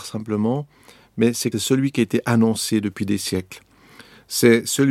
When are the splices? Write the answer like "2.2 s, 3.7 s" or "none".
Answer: 1.5 s